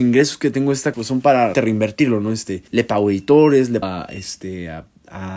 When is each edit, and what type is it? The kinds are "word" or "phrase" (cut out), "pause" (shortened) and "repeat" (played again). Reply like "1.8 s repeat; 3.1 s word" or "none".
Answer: 0.9 s word; 1.5 s word; 2.7 s pause; 3.8 s word